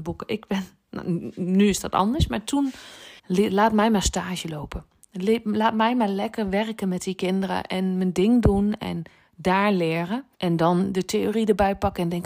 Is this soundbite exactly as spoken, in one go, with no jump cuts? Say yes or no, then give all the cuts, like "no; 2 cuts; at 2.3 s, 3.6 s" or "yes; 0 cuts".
no; 2 cuts; at 3.2 s, 10.3 s